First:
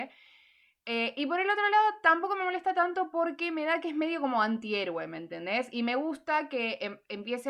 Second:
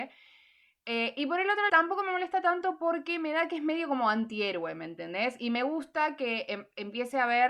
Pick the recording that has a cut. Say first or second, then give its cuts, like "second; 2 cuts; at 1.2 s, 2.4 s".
second; 1 cut; at 1.7 s